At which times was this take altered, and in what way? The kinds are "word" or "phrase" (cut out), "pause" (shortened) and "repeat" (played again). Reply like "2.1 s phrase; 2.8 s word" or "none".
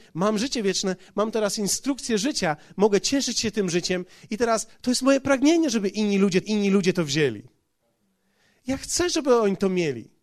6.4 s repeat